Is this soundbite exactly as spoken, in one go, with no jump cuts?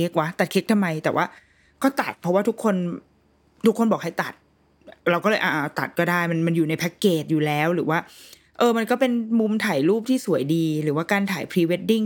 yes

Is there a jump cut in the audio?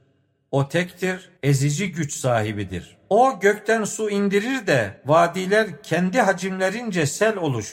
yes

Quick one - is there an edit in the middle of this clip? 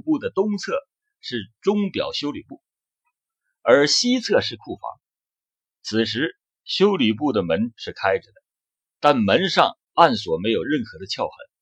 no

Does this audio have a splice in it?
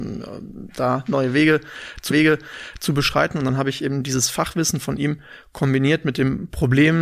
yes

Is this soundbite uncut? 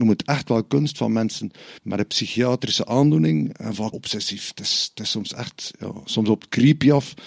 no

